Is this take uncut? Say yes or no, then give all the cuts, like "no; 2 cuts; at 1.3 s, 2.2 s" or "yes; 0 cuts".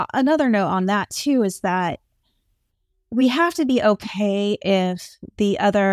yes; 0 cuts